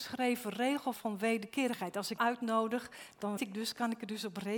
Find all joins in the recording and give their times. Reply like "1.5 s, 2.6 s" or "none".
0.9 s, 2.2 s, 3.4 s